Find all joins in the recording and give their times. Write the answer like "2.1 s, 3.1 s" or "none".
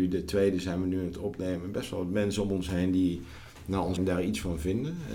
4.0 s